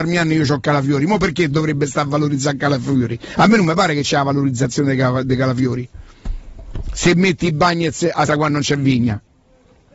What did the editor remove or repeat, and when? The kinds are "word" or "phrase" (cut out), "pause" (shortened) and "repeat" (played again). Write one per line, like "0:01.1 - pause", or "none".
0:08.3 - word